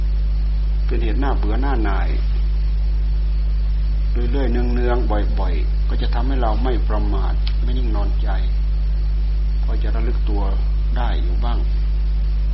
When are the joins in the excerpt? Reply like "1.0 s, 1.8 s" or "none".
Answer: 5.8 s